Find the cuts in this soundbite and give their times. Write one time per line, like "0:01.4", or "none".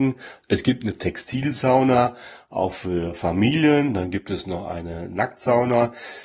none